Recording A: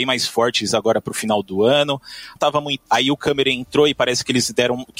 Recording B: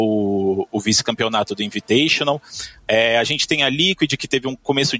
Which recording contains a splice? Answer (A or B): A